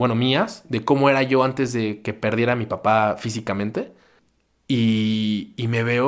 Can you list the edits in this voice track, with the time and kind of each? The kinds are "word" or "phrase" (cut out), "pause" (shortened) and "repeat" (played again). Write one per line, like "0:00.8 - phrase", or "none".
0:04.2 - pause